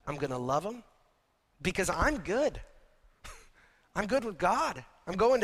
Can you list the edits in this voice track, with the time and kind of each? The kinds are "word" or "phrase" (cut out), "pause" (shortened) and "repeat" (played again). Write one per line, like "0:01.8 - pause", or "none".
none